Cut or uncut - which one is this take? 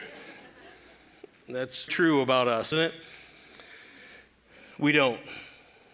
cut